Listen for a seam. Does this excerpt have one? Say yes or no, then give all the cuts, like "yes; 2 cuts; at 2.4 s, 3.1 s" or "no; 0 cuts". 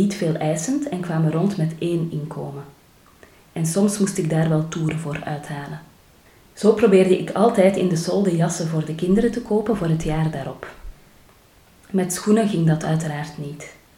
yes; 1 cut; at 6.3 s